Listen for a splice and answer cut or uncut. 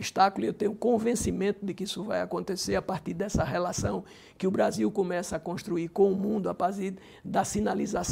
uncut